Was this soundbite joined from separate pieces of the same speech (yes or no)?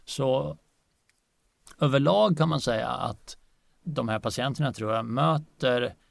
no